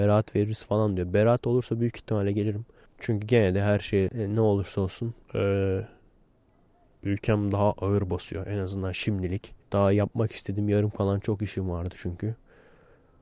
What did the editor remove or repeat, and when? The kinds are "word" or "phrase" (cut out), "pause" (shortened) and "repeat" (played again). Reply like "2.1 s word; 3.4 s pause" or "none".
2.9 s pause; 4.1 s word; 5.2 s pause; 9.6 s pause